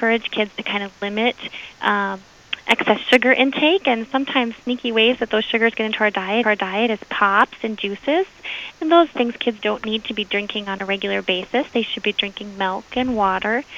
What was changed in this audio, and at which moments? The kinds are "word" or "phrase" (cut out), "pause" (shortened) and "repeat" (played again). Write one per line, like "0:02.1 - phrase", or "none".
0:06.4 - repeat
0:09.1 - word
0:09.6 - word